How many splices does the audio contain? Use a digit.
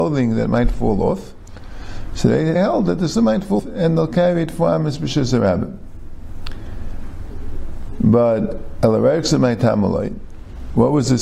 3